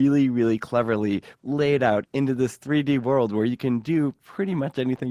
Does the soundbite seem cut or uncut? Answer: uncut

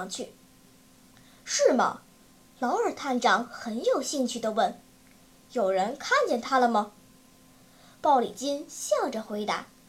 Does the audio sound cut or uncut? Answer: uncut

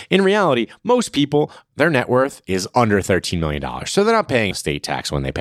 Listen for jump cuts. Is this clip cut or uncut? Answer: cut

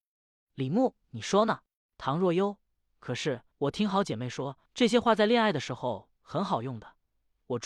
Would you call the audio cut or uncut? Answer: cut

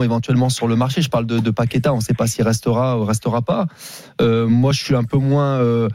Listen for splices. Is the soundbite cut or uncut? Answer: uncut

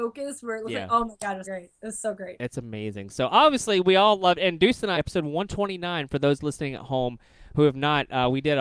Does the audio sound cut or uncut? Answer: cut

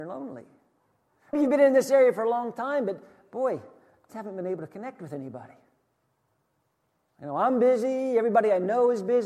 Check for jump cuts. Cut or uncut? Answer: cut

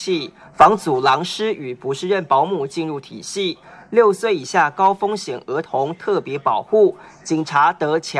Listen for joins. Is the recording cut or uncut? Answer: uncut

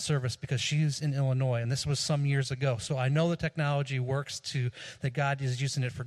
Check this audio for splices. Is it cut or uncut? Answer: uncut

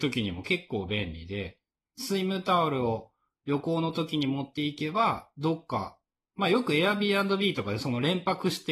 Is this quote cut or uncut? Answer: uncut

